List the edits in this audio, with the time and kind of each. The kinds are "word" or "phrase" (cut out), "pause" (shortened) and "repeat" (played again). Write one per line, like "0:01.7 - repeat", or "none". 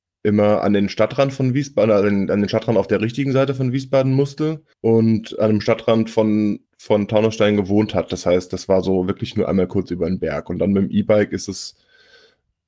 0:04.7 - pause
0:06.7 - pause